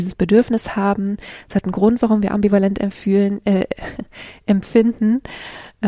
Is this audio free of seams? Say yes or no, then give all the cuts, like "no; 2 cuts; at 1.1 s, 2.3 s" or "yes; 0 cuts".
yes; 0 cuts